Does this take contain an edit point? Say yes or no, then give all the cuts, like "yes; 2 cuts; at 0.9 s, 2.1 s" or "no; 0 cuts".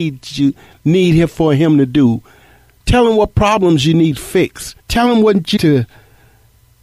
yes; 2 cuts; at 4.8 s, 5.6 s